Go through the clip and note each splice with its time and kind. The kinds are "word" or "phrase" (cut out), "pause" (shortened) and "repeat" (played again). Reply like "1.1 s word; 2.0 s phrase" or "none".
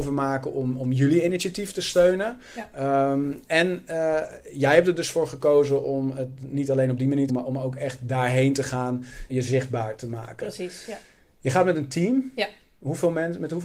7.3 s phrase; 9.3 s word